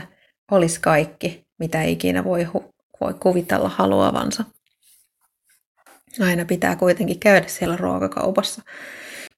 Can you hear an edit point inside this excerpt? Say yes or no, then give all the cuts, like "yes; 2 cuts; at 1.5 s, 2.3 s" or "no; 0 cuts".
no; 0 cuts